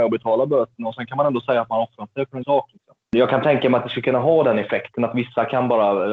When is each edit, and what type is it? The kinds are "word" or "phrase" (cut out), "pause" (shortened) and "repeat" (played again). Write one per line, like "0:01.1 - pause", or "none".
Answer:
0:02.4 - word